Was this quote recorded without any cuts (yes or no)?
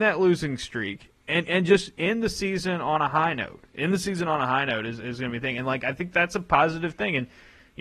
yes